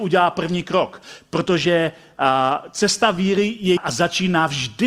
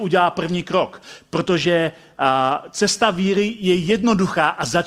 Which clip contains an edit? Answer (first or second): first